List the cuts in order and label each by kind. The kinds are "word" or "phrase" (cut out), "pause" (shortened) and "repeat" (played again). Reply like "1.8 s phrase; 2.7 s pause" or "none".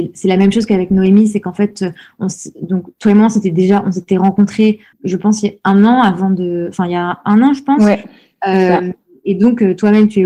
4.9 s word